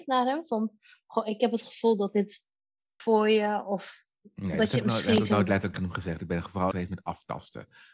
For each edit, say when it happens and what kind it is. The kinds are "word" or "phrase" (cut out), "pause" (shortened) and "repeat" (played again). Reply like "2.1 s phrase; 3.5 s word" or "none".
3.0 s phrase; 5.7 s word; 6.7 s phrase